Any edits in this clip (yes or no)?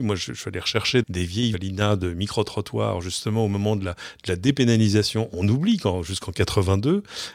yes